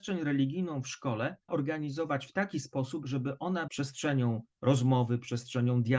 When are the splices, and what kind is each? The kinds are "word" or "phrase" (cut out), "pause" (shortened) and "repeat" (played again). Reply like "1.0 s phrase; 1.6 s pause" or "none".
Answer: 1.5 s word; 3.7 s word